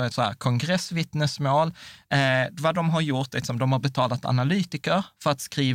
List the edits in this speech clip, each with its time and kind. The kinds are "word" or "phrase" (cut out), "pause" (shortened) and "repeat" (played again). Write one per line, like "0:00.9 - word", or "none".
none